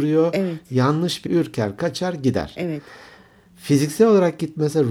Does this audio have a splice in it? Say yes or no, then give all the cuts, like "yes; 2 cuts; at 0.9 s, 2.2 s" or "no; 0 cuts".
yes; 1 cut; at 1.3 s